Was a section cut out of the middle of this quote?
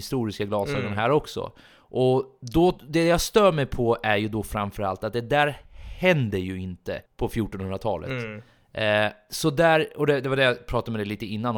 yes; 2 cuts; at 5.7 s, 7.1 s

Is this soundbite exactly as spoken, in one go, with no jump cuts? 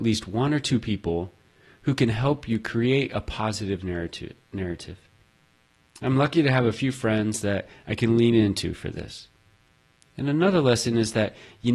yes; 0 cuts

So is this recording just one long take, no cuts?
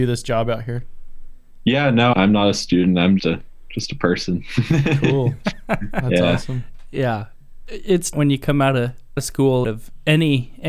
no; 5 cuts; at 2.1 s, 3.2 s, 8.1 s, 9.2 s, 9.6 s

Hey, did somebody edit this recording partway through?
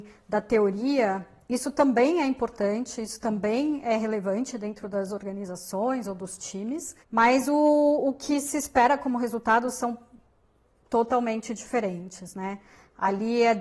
yes; 1 cut; at 7.0 s

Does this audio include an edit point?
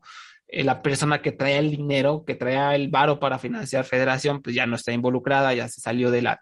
no; 0 cuts

